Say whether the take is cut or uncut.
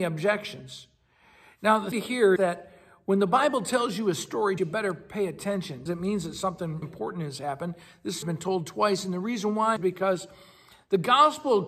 cut